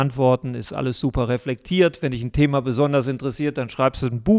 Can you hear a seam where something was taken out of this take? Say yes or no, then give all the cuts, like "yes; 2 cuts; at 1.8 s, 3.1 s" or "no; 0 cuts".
no; 0 cuts